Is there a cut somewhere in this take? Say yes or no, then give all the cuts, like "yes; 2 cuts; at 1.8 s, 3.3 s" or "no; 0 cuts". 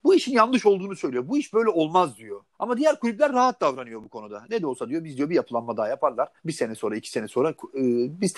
yes; 2 cuts; at 2.5 s, 6.4 s